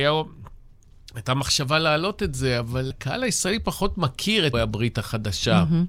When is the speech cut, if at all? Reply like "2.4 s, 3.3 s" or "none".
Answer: 2.9 s, 4.5 s